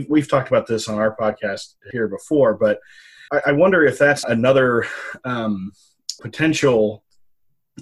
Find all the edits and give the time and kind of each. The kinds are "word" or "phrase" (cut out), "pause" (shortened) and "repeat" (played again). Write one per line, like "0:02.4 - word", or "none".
0:01.9 - word
0:03.3 - word
0:04.2 - word
0:06.2 - phrase